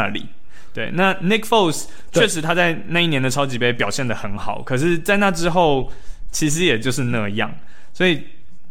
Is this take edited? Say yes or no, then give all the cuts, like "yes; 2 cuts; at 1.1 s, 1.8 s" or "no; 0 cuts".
no; 0 cuts